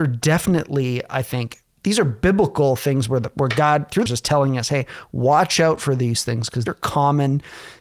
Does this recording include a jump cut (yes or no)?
yes